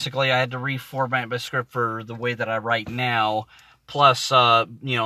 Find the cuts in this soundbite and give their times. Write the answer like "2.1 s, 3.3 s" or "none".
none